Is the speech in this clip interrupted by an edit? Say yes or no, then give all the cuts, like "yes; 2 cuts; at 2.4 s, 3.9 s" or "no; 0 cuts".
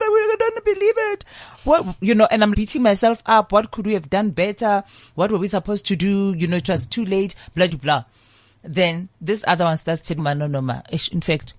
yes; 3 cuts; at 2.5 s, 7.7 s, 10.2 s